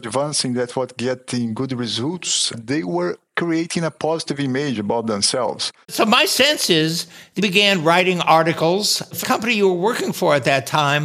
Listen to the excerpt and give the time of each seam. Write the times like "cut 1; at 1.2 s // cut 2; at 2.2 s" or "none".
cut 1; at 5.8 s // cut 2; at 7.4 s // cut 3; at 9.2 s